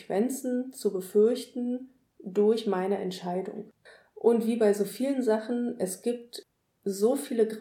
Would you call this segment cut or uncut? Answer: uncut